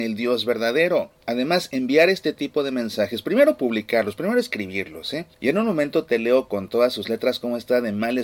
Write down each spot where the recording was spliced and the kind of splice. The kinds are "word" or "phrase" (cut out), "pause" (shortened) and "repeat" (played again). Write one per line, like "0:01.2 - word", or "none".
0:01.2 - pause
0:05.3 - pause